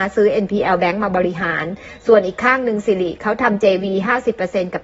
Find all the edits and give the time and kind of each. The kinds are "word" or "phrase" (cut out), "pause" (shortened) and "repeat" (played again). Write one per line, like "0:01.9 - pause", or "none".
none